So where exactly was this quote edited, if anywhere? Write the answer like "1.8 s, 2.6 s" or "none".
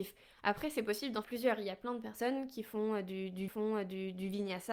1.2 s, 3.5 s